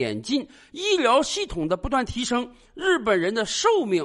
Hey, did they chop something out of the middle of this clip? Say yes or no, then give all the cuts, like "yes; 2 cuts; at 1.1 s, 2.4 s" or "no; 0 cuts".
no; 0 cuts